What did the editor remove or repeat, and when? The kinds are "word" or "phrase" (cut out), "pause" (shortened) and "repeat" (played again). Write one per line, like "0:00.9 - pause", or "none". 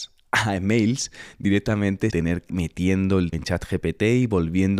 0:02.1 - word
0:02.5 - word
0:03.3 - word

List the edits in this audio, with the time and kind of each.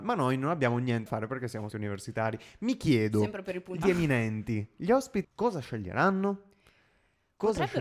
0:01.1 - word
0:01.7 - word
0:03.8 - word
0:05.2 - word

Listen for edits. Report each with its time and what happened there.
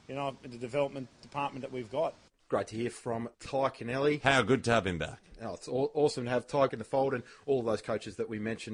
0:03.3 - pause
0:06.7 - word

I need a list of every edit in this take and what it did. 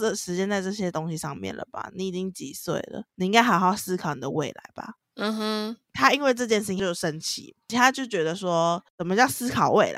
0:03.1 - pause
0:08.9 - pause

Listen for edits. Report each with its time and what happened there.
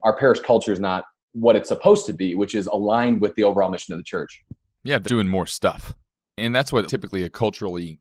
0:01.2 - pause
0:05.0 - word
0:06.9 - word

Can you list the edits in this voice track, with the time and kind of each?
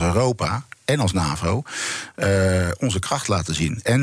none

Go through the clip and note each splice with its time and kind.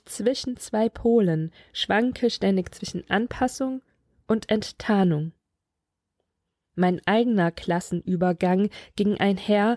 none

